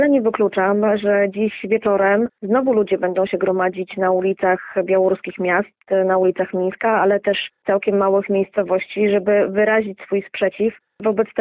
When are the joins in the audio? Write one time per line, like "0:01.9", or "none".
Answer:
0:02.4
0:07.6